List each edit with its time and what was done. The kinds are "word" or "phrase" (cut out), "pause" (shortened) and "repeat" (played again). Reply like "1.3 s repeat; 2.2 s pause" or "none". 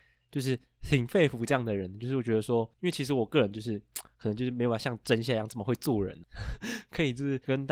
2.7 s pause